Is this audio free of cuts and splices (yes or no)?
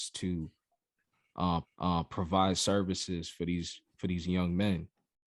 no